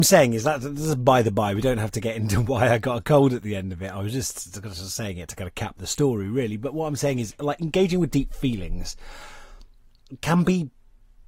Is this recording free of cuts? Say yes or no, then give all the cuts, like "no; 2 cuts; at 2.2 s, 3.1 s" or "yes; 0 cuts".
yes; 0 cuts